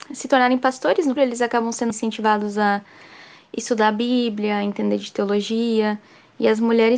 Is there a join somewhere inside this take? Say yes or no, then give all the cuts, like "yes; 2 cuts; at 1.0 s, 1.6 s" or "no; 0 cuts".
yes; 2 cuts; at 1.2 s, 1.9 s